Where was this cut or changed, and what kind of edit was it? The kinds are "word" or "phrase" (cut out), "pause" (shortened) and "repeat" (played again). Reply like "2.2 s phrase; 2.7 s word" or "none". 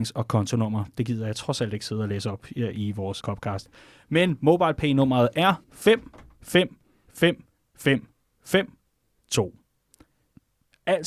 3.2 s word; 5.6 s pause

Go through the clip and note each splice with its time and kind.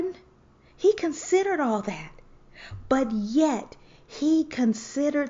none

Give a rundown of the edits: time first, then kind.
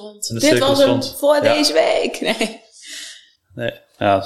none

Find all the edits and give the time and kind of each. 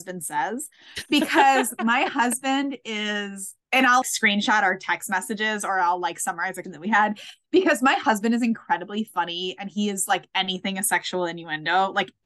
3.6 s pause; 4.0 s word; 6.6 s word; 10.3 s phrase

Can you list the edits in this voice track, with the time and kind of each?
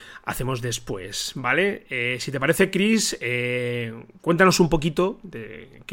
none

